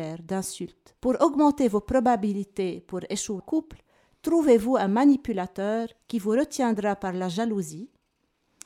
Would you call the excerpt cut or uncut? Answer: cut